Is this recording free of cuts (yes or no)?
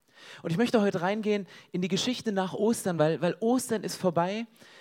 yes